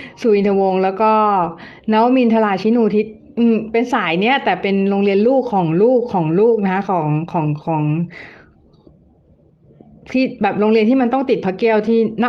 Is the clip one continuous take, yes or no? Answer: yes